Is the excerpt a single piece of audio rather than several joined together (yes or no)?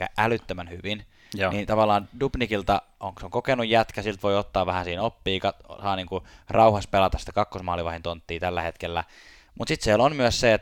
yes